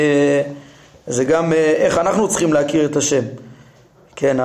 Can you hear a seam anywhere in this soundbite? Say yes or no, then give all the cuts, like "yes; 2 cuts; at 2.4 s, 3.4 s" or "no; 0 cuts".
no; 0 cuts